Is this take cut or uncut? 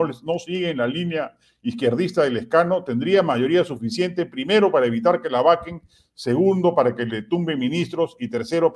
uncut